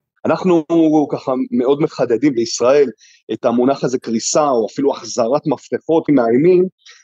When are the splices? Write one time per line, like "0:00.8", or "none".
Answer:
0:06.1